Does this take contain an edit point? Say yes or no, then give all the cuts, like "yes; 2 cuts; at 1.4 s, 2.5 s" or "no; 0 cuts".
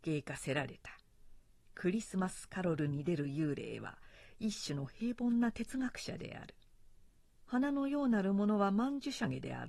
no; 0 cuts